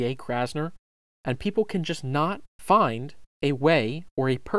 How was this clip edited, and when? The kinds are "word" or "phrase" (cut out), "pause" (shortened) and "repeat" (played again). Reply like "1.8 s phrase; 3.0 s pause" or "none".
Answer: 2.5 s pause